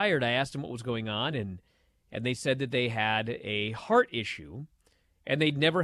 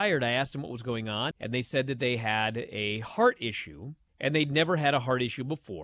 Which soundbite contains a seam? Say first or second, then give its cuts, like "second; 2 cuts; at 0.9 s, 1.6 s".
second; 2 cuts; at 1.3 s, 4.1 s